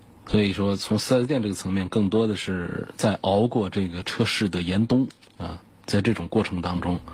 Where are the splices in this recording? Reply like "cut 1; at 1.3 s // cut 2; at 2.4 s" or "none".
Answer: cut 1; at 5.3 s